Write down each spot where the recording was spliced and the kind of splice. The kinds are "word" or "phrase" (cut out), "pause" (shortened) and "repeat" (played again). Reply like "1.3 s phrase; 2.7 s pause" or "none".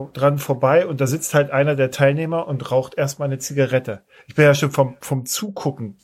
none